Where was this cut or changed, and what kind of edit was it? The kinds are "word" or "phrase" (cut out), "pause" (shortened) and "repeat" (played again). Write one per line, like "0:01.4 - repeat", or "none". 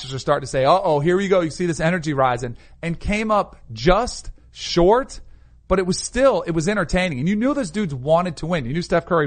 none